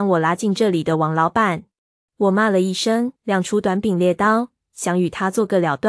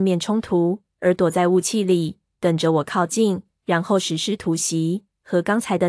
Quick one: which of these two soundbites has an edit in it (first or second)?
first